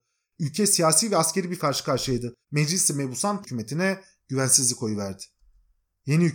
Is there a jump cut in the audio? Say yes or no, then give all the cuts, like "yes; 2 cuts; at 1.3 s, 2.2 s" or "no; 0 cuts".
yes; 3 cuts; at 1.6 s, 2.4 s, 3.4 s